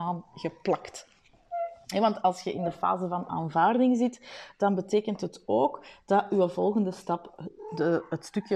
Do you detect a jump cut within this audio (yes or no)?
no